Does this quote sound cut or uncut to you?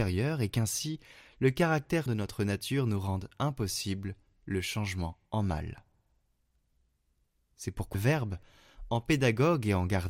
cut